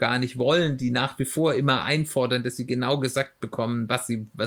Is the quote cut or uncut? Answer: uncut